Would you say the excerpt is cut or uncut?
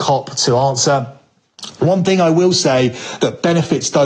uncut